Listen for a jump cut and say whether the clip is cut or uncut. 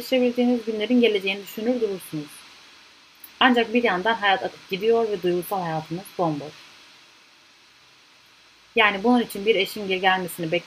uncut